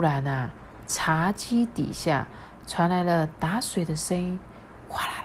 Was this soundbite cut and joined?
no; 0 cuts

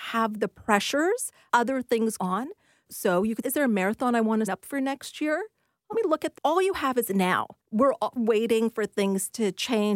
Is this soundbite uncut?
no; 7 cuts; at 1.5 s, 2.2 s, 3.4 s, 4.5 s, 5.9 s, 6.4 s, 8.2 s

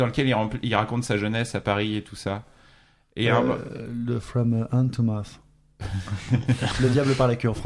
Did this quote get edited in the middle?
no; 0 cuts

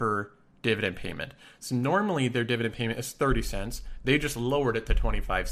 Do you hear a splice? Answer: no; 0 cuts

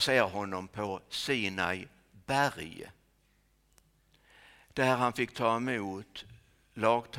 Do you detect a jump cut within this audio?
no; 0 cuts

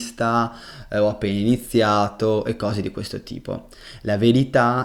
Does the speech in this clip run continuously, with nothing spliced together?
yes; 0 cuts

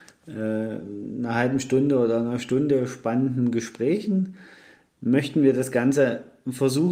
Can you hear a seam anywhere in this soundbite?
no; 0 cuts

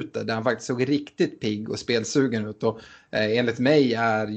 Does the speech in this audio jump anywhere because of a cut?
no; 0 cuts

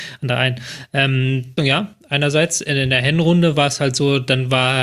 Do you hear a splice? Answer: yes; 1 cut; at 1.6 s

